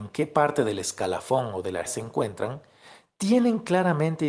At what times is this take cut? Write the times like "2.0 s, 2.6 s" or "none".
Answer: 1.9 s